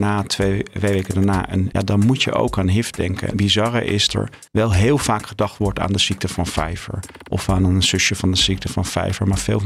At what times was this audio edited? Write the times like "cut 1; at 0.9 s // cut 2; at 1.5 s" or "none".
cut 1; at 1.7 s // cut 2; at 3.3 s // cut 3; at 4.1 s // cut 4; at 4.5 s

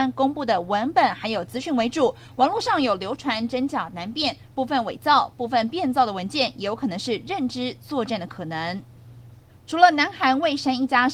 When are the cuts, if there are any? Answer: cut 1; at 9.5 s

